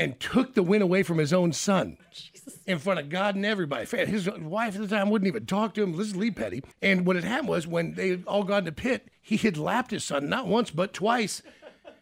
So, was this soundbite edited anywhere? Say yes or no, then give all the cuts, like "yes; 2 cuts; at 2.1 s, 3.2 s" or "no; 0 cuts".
yes; 1 cut; at 6.7 s